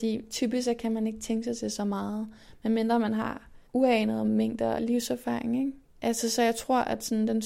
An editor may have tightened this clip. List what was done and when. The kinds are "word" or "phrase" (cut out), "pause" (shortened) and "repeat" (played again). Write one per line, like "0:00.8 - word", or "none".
0:03.7 - pause
0:04.8 - phrase